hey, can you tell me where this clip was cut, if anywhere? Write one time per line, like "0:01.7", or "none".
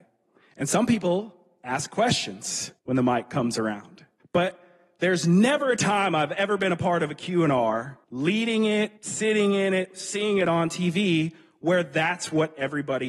0:02.8
0:04.2
0:08.0
0:09.0